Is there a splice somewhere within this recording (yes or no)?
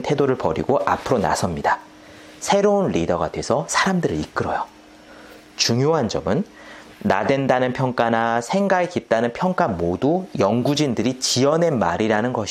no